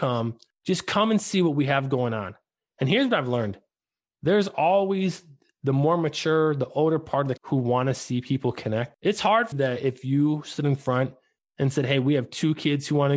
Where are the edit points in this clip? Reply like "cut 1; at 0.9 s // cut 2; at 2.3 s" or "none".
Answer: cut 1; at 7.4 s // cut 2; at 9.5 s